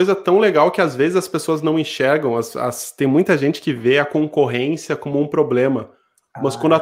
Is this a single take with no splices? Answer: yes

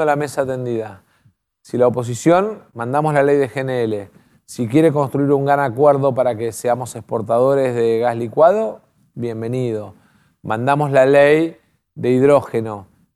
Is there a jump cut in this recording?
yes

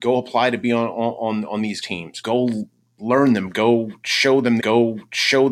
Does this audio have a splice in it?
yes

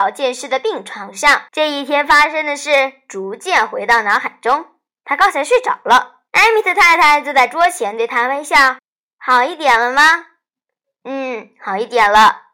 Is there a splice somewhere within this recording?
yes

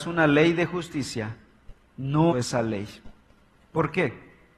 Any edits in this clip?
yes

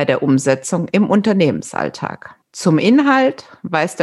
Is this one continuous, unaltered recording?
no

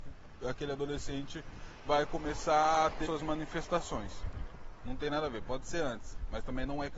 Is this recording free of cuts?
no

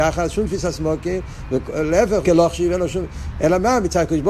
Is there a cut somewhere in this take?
yes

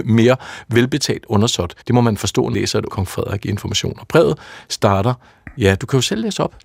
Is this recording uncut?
no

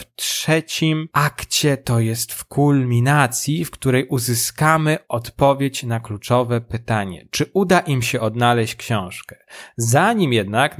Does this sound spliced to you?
yes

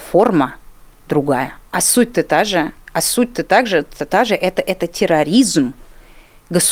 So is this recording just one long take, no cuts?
no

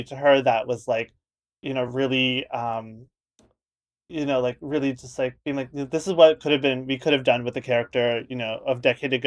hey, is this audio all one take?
yes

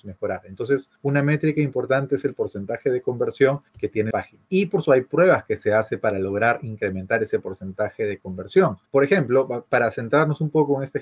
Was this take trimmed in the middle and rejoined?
yes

